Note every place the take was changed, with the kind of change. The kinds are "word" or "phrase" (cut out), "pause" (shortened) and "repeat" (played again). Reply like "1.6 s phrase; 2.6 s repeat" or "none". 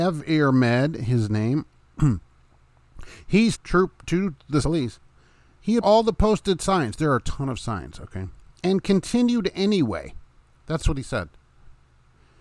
3.5 s word; 4.6 s word; 5.8 s word